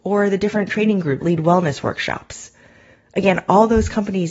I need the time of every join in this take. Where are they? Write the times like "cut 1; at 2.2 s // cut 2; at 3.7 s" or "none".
cut 1; at 1.2 s